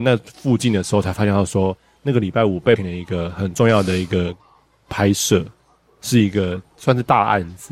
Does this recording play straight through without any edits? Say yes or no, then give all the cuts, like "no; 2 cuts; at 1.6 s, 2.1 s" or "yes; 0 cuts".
no; 1 cut; at 2.8 s